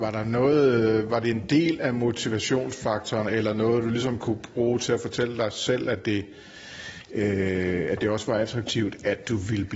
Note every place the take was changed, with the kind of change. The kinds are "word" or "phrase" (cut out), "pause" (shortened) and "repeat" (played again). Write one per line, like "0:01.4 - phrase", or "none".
none